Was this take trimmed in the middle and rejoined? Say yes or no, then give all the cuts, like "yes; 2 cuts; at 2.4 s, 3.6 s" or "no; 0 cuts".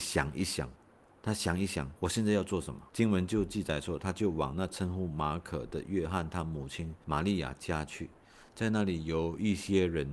yes; 1 cut; at 2.9 s